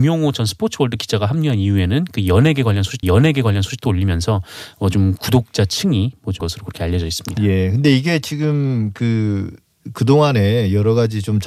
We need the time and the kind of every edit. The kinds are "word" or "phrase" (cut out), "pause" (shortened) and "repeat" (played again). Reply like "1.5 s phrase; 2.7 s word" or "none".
3.0 s repeat; 6.4 s word